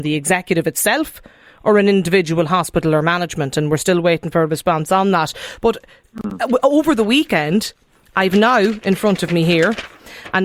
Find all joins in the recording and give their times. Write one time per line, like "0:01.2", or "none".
none